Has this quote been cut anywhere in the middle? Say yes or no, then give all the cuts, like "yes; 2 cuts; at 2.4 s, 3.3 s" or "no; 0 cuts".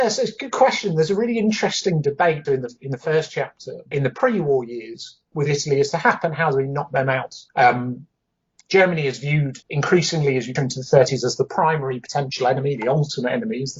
yes; 6 cuts; at 2.4 s, 3.9 s, 5.3 s, 7.5 s, 9.6 s, 10.6 s